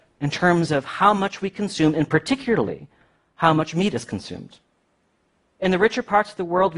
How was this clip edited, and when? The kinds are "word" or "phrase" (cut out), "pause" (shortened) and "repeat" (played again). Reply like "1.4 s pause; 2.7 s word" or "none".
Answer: none